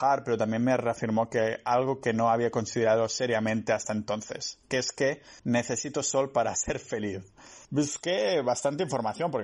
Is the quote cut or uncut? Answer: cut